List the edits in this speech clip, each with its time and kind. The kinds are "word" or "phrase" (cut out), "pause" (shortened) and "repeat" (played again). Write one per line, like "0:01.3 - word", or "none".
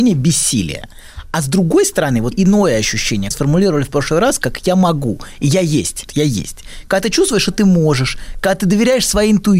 0:02.3 - phrase
0:03.3 - phrase
0:06.1 - word